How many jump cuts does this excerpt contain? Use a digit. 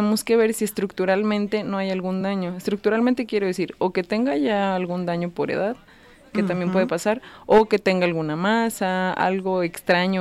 0